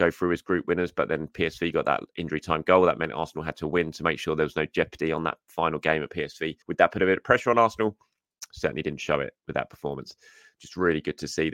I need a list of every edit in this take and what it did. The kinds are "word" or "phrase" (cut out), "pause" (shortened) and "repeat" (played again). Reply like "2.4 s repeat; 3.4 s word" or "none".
6.6 s pause